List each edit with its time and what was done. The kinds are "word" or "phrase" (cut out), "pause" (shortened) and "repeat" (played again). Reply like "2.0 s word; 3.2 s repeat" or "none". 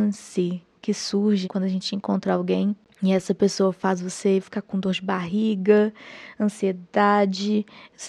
1.4 s word